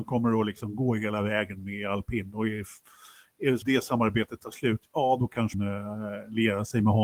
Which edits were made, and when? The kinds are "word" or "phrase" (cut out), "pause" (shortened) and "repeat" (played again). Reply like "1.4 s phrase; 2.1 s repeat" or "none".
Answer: 3.6 s word; 5.5 s word